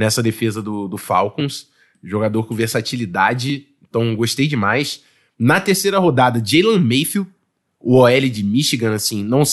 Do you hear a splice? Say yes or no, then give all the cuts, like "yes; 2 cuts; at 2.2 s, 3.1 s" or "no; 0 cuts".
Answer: no; 0 cuts